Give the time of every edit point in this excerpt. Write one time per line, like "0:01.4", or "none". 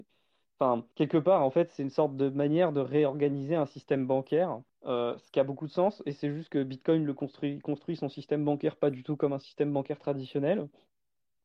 0:00.9
0:04.7